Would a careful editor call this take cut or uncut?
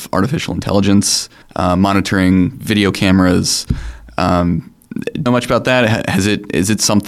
cut